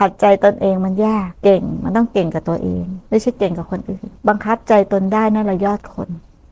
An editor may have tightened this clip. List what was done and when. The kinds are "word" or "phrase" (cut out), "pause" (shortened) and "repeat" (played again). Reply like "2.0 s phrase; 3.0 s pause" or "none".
1.3 s pause; 3.1 s pause; 4.2 s pause

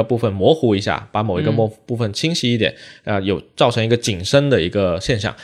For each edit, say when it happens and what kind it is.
none

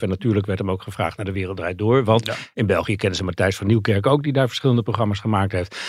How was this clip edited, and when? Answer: none

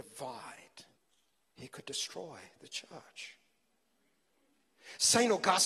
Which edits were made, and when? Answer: 1.0 s pause

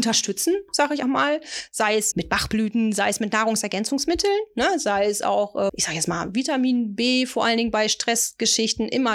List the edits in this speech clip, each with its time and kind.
1.0 s word; 2.1 s word; 5.7 s word

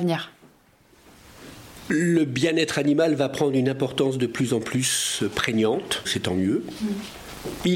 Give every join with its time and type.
6.0 s word

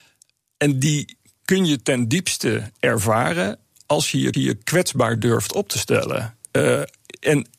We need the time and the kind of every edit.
4.3 s repeat

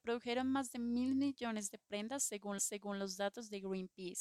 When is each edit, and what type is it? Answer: 2.6 s repeat

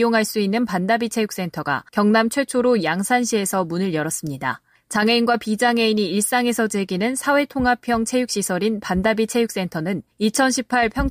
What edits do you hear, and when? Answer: 1.9 s pause; 4.8 s pause; 10.1 s pause

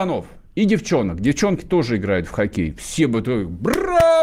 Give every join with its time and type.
none

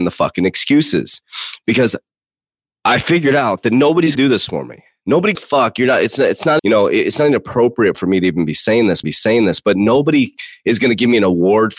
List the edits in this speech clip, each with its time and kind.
4.1 s word; 5.3 s phrase; 6.6 s word; 7.9 s word; 9.0 s repeat

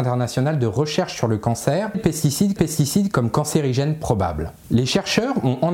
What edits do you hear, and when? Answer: 1.9 s word; 2.6 s repeat

